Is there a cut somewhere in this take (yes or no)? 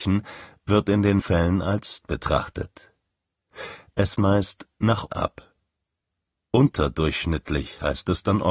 yes